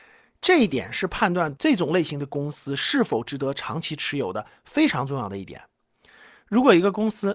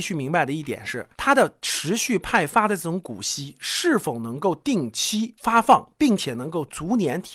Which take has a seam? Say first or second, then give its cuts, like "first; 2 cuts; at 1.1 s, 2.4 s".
second; 1 cut; at 1.1 s